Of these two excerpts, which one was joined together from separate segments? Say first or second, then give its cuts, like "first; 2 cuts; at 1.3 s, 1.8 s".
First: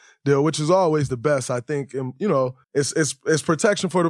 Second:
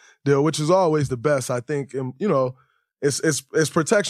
first; 1 cut; at 2.6 s